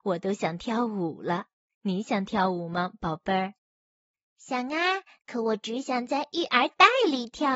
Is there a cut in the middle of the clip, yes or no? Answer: no